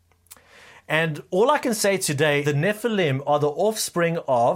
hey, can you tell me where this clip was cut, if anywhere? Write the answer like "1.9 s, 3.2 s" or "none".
2.4 s